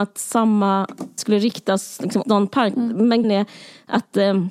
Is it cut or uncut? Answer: cut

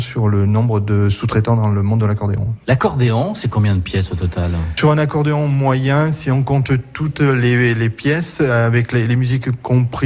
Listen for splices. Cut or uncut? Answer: uncut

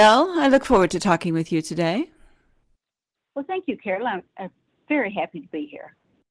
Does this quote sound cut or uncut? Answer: uncut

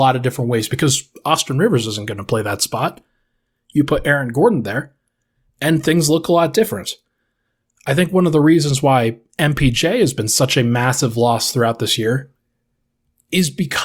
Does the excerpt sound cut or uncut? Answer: uncut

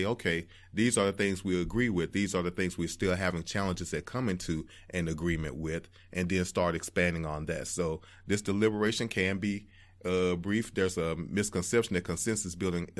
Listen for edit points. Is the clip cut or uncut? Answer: uncut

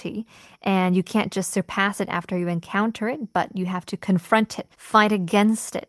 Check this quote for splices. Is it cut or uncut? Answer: cut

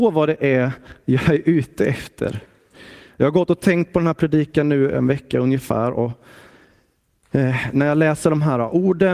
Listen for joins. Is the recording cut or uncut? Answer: uncut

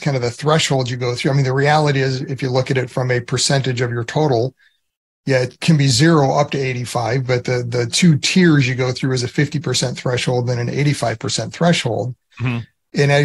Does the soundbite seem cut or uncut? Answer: uncut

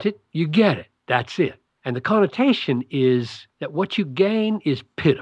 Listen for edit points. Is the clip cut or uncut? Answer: cut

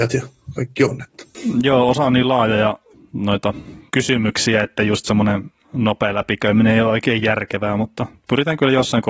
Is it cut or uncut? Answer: uncut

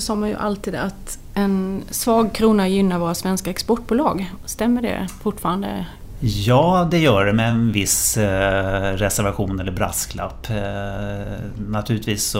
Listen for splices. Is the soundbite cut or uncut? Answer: uncut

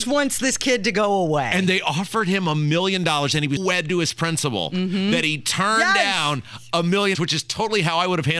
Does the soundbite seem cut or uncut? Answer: cut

